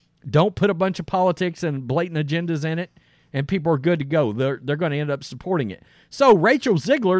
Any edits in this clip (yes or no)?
no